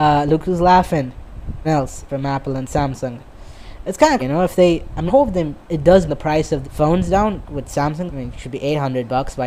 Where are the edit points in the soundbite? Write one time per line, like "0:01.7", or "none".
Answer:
0:01.6
0:02.1
0:04.2
0:05.1
0:05.7
0:06.1
0:06.6
0:08.1